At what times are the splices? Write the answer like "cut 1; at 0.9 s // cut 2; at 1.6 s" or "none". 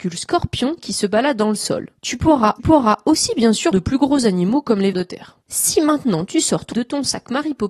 cut 1; at 2.0 s // cut 2; at 2.6 s // cut 3; at 3.7 s // cut 4; at 4.9 s // cut 5; at 5.4 s // cut 6; at 6.7 s